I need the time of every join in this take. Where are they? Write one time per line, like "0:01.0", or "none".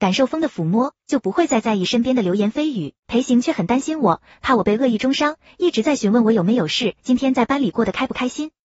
0:03.0
0:07.0